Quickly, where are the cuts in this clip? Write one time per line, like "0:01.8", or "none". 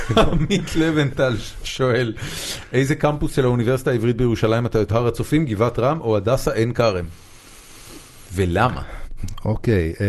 0:04.9